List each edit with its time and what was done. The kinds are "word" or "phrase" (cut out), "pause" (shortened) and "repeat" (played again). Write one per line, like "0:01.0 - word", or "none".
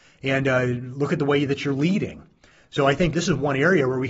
0:03.1 - word